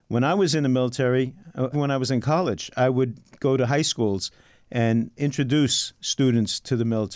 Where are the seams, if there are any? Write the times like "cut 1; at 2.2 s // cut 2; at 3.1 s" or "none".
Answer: cut 1; at 1.7 s // cut 2; at 5.1 s